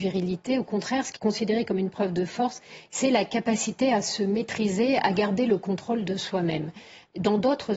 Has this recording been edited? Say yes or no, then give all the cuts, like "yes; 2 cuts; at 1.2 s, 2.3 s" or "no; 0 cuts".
yes; 1 cut; at 1.2 s